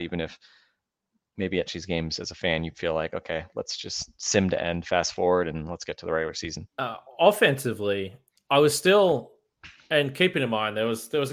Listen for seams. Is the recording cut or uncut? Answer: cut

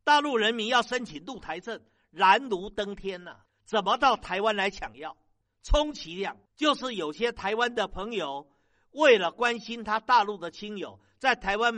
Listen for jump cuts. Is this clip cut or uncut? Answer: uncut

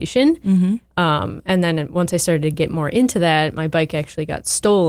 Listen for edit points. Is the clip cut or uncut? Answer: uncut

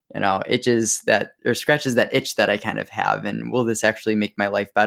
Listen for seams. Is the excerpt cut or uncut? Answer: uncut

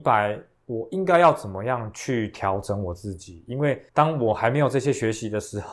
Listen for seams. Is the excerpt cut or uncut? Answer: cut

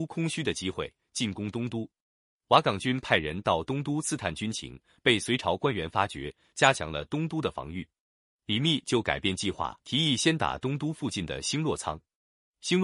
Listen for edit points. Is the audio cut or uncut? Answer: cut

